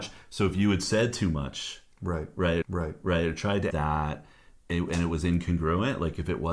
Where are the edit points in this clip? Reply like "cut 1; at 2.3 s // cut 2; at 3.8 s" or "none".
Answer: cut 1; at 2.6 s // cut 2; at 3.7 s